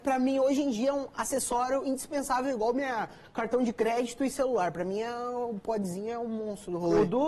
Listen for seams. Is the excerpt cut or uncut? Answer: uncut